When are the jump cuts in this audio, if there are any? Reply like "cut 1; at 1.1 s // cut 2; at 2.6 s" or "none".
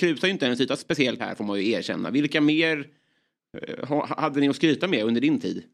cut 1; at 1.2 s